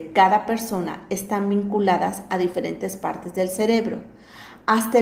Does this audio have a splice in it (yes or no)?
no